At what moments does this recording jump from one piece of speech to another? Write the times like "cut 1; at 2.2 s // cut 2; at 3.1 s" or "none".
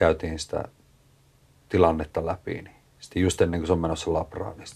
none